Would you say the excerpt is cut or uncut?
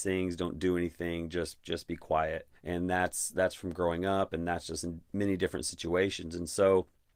cut